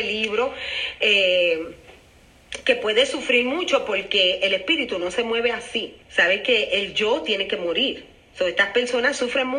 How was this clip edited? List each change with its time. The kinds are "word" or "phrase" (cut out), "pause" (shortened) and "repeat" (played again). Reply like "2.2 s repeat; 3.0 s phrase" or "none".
6.0 s pause

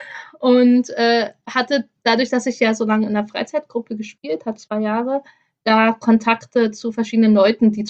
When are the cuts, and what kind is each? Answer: 4.6 s word

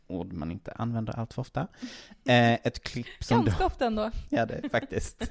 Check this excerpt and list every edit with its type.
none

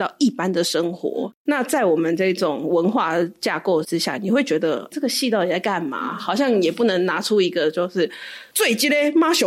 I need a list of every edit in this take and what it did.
4.9 s word

